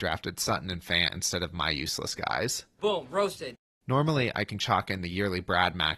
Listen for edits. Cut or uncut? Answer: uncut